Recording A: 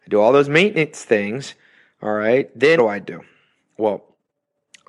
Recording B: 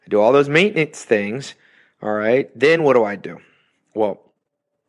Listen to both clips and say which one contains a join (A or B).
A